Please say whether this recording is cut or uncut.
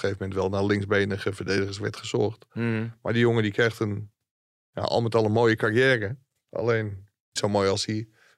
cut